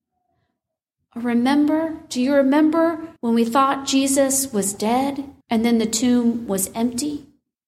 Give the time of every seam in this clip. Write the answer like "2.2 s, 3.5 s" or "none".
3.2 s, 5.4 s